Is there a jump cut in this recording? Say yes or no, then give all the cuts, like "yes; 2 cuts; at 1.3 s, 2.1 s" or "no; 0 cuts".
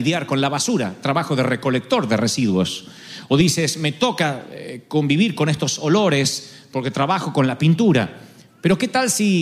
no; 0 cuts